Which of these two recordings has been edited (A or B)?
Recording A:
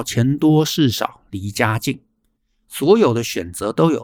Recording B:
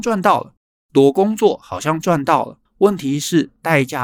B